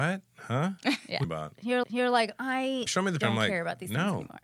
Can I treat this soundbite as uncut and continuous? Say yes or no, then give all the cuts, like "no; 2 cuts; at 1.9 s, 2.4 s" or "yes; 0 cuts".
no; 4 cuts; at 1.2 s, 1.8 s, 2.9 s, 3.2 s